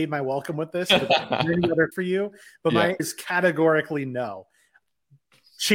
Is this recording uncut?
no; 2 cuts; at 1.9 s, 3.0 s

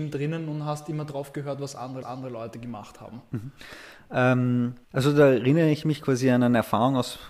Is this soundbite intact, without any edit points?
no; 2 cuts; at 2.0 s, 4.8 s

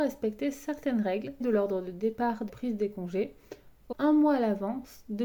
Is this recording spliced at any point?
yes; 3 cuts; at 1.4 s, 2.5 s, 3.9 s

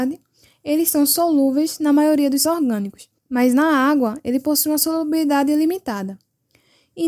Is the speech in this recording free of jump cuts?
no; 2 cuts; at 2.4 s, 3.2 s

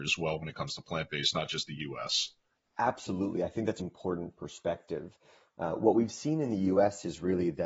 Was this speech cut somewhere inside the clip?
yes; 1 cut; at 3.8 s

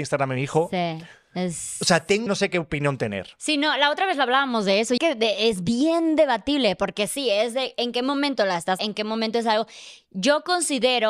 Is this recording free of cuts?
no; 3 cuts; at 2.3 s, 5.0 s, 8.8 s

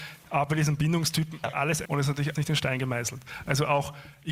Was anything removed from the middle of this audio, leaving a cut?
yes; 3 cuts; at 1.4 s, 1.8 s, 2.3 s

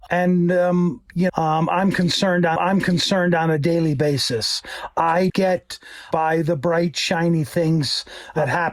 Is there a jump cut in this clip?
yes; 4 cuts; at 1.3 s, 2.6 s, 5.3 s, 6.1 s

